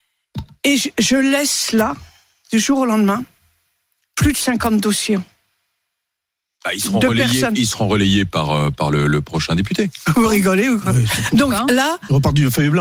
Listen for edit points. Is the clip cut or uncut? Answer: uncut